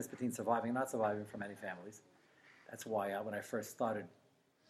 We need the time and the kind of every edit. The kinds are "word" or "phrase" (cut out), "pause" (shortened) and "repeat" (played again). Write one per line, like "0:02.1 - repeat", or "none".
none